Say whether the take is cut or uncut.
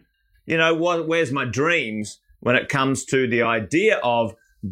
uncut